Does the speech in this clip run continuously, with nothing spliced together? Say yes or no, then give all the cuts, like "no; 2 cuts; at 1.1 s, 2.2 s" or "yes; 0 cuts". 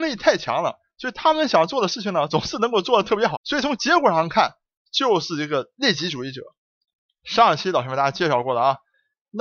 no; 1 cut; at 3.3 s